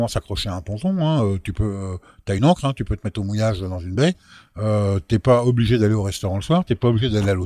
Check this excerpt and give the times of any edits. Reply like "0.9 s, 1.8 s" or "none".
none